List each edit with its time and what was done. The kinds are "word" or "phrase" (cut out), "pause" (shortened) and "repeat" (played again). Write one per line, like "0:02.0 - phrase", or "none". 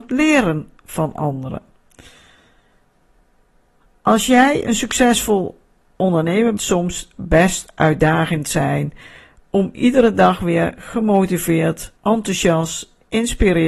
0:06.6 - phrase
0:12.0 - pause